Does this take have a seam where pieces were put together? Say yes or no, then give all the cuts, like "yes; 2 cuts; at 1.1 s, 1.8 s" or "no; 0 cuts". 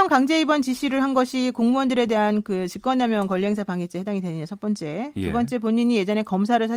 no; 0 cuts